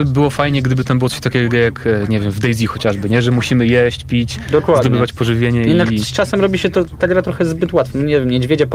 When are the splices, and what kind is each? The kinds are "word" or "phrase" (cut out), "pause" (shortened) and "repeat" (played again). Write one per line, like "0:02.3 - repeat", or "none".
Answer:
none